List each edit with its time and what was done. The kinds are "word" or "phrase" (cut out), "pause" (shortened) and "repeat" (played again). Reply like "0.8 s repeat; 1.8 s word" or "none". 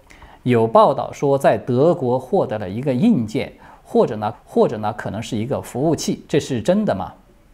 4.3 s repeat; 6.3 s pause